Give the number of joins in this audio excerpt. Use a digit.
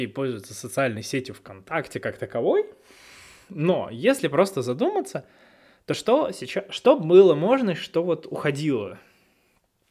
0